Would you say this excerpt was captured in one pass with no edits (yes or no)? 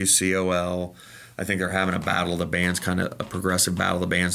yes